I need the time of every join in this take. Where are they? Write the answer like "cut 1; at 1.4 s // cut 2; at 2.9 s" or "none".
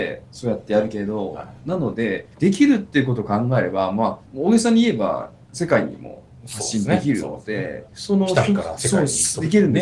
cut 1; at 2.3 s // cut 2; at 4.2 s // cut 3; at 7.9 s